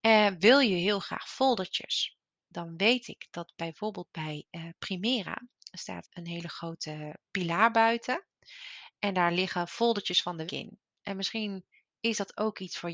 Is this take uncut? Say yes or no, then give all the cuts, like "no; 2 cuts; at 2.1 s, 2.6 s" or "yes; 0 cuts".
no; 2 cuts; at 6.0 s, 10.5 s